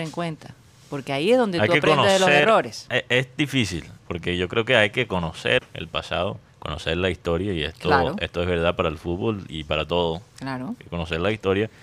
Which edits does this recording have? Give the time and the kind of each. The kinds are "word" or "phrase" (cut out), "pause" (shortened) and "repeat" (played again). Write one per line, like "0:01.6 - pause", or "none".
0:04.0 - pause
0:05.6 - word
0:06.5 - pause